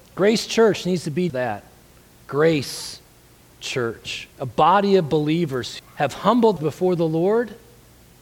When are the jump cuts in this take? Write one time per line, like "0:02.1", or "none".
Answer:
0:01.3
0:04.3
0:05.8
0:06.6